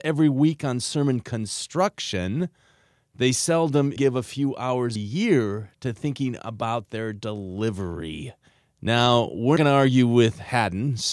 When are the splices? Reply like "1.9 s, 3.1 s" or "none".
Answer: 4.0 s, 5.0 s, 9.6 s